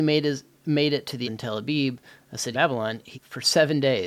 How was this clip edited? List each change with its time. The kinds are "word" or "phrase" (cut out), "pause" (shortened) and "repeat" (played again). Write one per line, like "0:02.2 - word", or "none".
0:01.2 - word
0:02.5 - word
0:03.1 - word